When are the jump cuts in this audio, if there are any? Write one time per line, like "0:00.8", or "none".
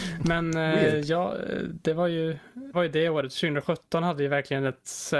0:02.7

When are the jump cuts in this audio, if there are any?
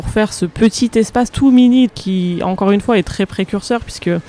0:01.3
0:01.9

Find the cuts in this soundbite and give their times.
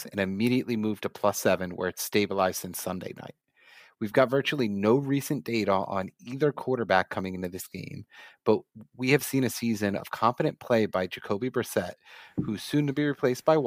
none

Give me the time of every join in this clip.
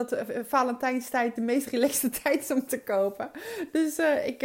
0:01.4
0:02.7

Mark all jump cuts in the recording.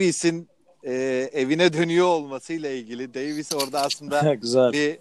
none

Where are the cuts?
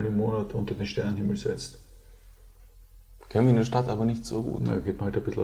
none

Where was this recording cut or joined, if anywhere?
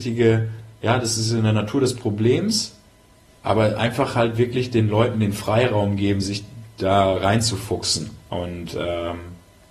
none

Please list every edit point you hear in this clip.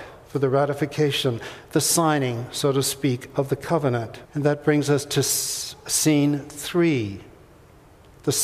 0:04.3

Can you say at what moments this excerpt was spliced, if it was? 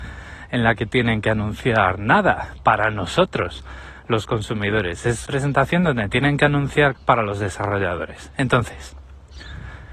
0:05.3
0:06.9

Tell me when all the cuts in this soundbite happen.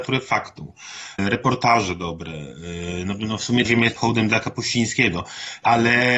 0:03.6
0:04.0

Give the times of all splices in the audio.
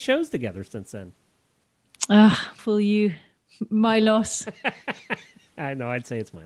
0:02.6

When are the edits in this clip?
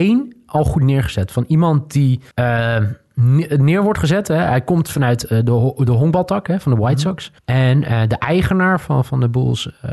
0:02.3
0:07.4

